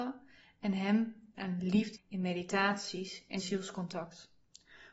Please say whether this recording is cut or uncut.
cut